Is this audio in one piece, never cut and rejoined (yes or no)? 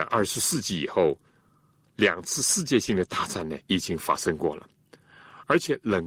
no